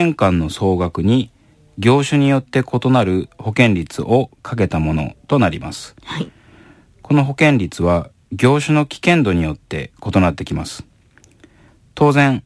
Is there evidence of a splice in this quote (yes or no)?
no